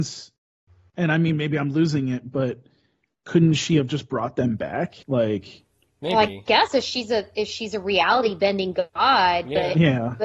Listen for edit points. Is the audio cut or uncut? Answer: cut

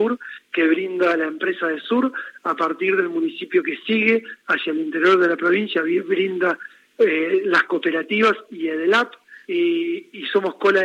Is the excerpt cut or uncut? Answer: cut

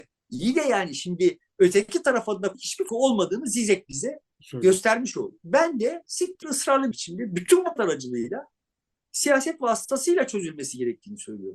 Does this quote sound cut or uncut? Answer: cut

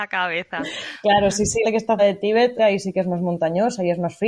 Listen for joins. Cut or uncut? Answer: cut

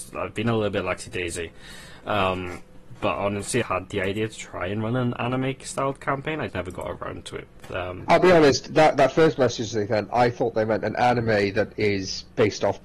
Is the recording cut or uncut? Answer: cut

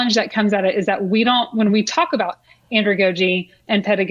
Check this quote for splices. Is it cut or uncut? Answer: uncut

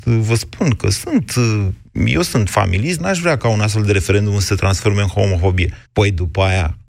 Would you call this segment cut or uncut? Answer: cut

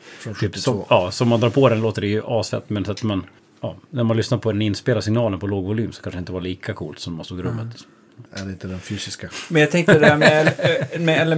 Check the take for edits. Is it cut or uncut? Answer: cut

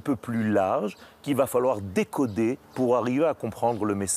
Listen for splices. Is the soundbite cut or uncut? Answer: cut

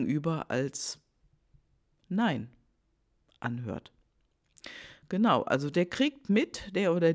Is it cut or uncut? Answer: uncut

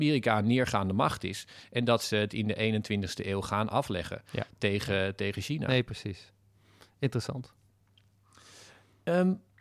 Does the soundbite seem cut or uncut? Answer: uncut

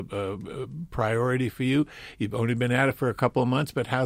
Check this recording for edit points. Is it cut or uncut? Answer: uncut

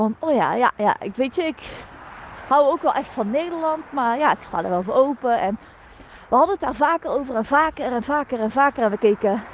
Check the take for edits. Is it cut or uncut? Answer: uncut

